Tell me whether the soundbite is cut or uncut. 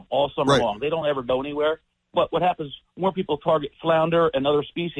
uncut